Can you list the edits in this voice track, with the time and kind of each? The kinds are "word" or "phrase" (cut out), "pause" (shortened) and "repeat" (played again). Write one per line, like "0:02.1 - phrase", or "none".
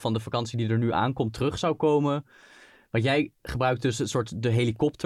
none